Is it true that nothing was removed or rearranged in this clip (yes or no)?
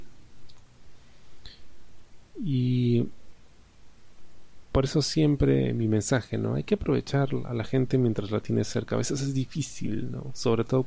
yes